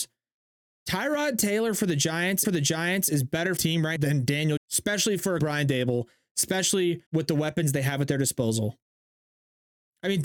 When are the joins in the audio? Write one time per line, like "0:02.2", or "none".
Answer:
0:02.4
0:03.6
0:04.0
0:04.6
0:05.4
0:07.1

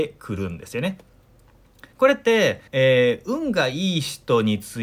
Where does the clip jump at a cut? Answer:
0:01.9
0:02.7

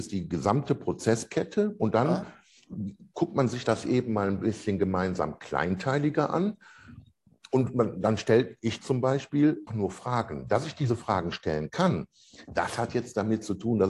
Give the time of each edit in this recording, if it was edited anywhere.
0:09.7

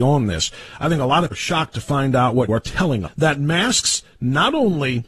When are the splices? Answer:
0:01.3
0:02.5
0:03.1

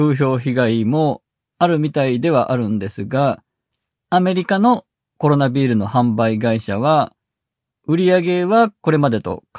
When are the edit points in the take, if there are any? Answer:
none

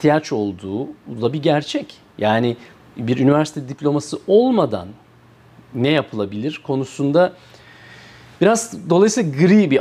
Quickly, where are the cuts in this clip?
none

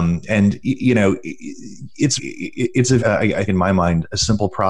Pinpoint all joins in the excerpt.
0:02.2
0:03.0
0:03.5

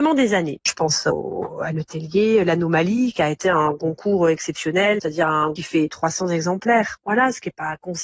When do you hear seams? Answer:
0:05.6

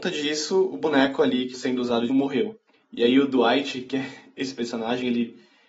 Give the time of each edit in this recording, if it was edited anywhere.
0:01.5
0:02.1
0:02.7

